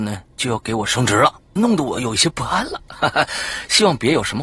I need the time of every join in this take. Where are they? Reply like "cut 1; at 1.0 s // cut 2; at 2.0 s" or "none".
cut 1; at 1.6 s